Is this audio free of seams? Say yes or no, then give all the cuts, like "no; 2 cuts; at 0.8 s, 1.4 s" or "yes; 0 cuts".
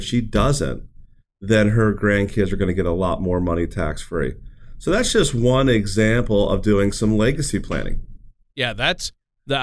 yes; 0 cuts